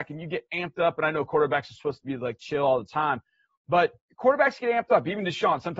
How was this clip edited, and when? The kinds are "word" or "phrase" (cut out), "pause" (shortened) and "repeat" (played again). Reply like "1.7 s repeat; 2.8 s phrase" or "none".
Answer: none